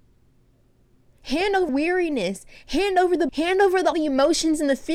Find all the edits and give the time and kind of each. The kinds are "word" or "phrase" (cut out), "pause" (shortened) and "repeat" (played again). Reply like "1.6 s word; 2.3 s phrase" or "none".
1.7 s word; 3.3 s word; 3.9 s word